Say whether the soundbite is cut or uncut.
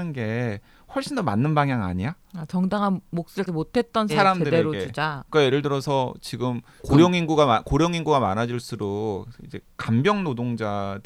cut